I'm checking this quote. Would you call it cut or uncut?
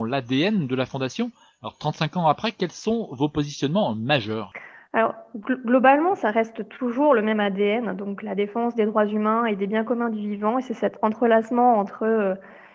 uncut